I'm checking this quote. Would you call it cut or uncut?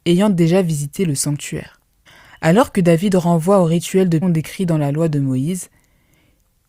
cut